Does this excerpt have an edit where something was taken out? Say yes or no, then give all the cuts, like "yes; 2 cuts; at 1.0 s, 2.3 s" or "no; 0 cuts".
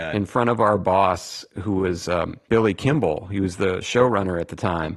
no; 0 cuts